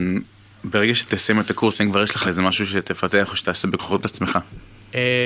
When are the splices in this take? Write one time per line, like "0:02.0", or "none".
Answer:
0:02.2